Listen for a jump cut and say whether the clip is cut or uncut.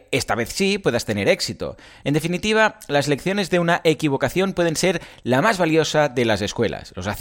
uncut